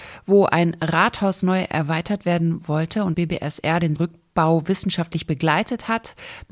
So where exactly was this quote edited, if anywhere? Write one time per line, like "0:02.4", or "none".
0:03.1
0:04.0